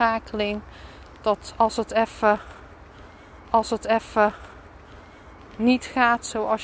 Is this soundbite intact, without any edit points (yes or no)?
no